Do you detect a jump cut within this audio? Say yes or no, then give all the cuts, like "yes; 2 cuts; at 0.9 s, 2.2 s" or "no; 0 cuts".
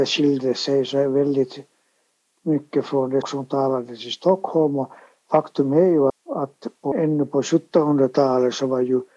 yes; 3 cuts; at 3.2 s, 6.1 s, 6.9 s